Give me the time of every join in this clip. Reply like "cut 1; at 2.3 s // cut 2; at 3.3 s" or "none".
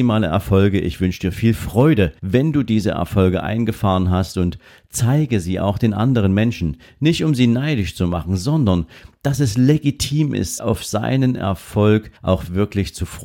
cut 1; at 2.2 s // cut 2; at 10.6 s // cut 3; at 12.2 s

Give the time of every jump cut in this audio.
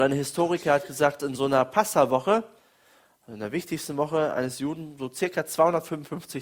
cut 1; at 1.2 s

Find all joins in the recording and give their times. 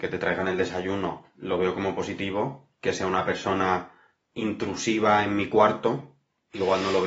none

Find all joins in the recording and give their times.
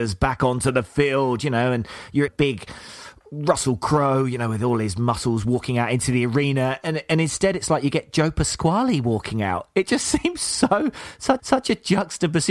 cut 1; at 2.3 s // cut 2; at 11.4 s

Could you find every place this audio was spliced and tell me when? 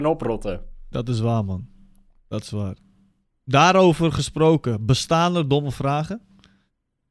none

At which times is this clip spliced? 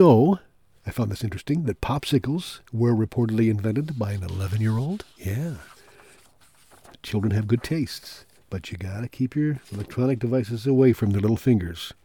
cut 1; at 2.6 s // cut 2; at 5.1 s // cut 3; at 8.4 s // cut 4; at 9.6 s

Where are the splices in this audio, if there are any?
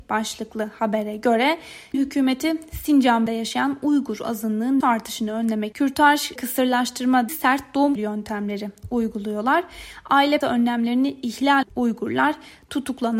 cut 1; at 1.9 s // cut 2; at 3.3 s // cut 3; at 4.8 s // cut 4; at 5.7 s // cut 5; at 6.4 s // cut 6; at 7.3 s // cut 7; at 8.0 s // cut 8; at 10.4 s // cut 9; at 11.6 s

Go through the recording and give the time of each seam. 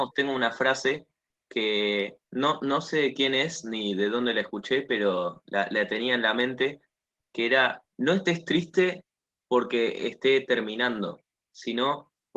cut 1; at 2.2 s // cut 2; at 7.9 s

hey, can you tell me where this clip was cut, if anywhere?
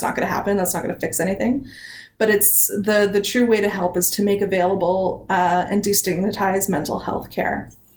none

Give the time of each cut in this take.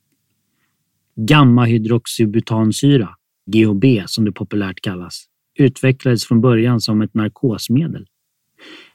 cut 1; at 3.5 s

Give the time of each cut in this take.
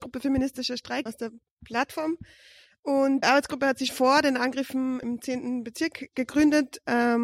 cut 1; at 1.1 s // cut 2; at 3.2 s // cut 3; at 3.9 s // cut 4; at 5.0 s

